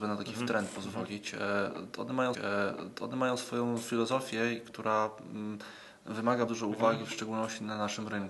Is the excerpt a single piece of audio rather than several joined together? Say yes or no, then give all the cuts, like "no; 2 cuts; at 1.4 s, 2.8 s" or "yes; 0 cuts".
no; 2 cuts; at 2.3 s, 6.5 s